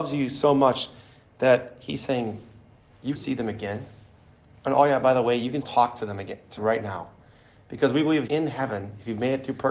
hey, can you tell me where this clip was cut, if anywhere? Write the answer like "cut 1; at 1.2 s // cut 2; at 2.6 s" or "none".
cut 1; at 3.2 s // cut 2; at 5.6 s // cut 3; at 6.6 s // cut 4; at 8.3 s